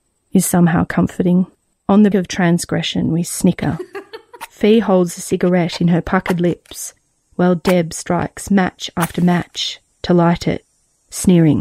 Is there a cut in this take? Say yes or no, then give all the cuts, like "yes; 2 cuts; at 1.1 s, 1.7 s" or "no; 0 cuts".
yes; 2 cuts; at 1.7 s, 2.1 s